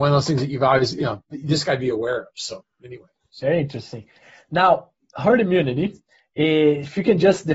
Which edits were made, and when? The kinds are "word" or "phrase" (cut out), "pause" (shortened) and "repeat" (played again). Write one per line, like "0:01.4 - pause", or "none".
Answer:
none